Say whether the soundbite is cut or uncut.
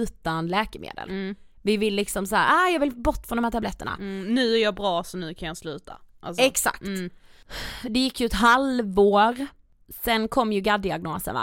uncut